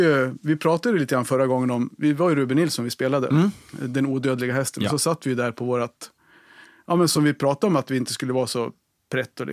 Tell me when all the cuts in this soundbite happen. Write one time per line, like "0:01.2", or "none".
none